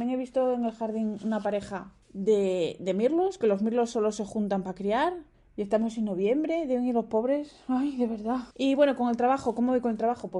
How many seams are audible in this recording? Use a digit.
1